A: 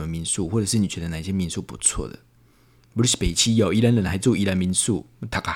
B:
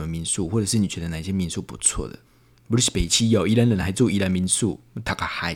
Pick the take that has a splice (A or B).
B